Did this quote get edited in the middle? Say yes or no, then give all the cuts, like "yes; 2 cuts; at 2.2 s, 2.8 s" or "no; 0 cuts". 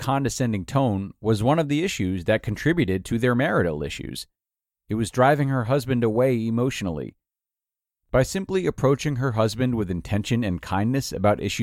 no; 0 cuts